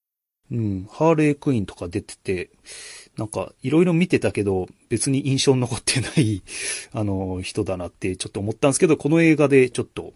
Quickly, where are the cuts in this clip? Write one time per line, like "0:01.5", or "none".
none